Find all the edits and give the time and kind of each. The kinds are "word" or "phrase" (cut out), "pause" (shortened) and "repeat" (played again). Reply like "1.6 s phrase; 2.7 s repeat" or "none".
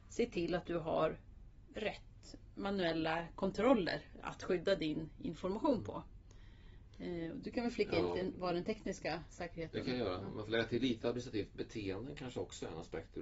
none